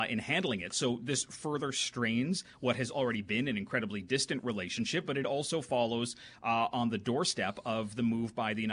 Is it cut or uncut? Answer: uncut